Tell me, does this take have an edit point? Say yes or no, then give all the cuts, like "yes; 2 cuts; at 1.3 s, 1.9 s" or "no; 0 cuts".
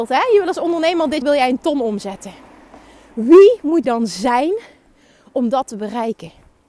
yes; 2 cuts; at 1.2 s, 3.8 s